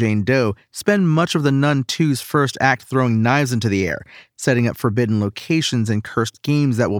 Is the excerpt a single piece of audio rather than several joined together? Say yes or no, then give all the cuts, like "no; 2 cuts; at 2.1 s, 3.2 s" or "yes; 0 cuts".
yes; 0 cuts